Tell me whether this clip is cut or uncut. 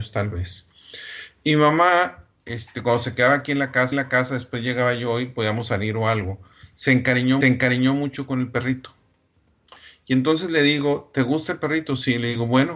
cut